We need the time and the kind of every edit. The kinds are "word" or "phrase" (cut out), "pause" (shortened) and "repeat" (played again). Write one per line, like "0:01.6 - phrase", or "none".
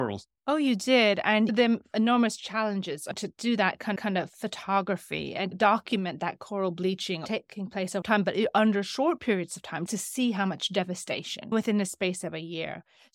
0:04.0 - repeat
0:05.5 - word
0:08.0 - phrase
0:09.9 - word
0:11.5 - word